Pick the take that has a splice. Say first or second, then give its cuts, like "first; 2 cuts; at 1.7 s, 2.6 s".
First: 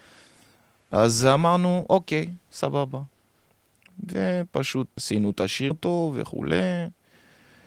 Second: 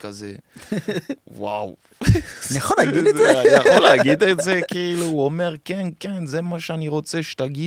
first; 2 cuts; at 5.0 s, 5.7 s